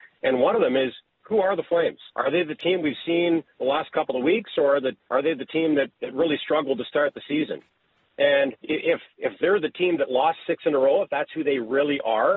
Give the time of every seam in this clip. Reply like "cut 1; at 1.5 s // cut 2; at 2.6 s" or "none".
cut 1; at 2.1 s // cut 2; at 5.0 s // cut 3; at 6.0 s // cut 4; at 8.6 s